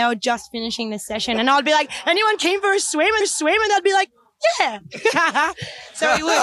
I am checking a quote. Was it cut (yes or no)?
yes